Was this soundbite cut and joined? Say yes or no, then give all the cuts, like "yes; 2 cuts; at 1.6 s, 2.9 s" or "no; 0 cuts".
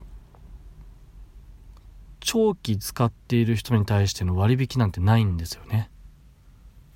no; 0 cuts